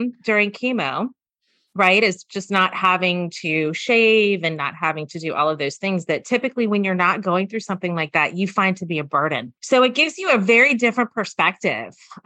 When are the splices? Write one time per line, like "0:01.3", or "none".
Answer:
0:09.6